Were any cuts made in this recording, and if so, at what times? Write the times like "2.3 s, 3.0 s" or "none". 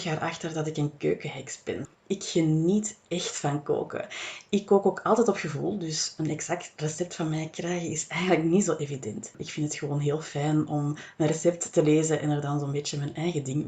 none